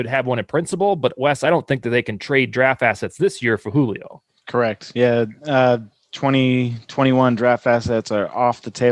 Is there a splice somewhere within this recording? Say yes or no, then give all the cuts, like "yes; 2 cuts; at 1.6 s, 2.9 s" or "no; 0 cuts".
no; 0 cuts